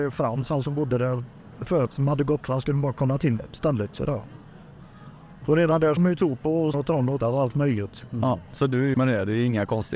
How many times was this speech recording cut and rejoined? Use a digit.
6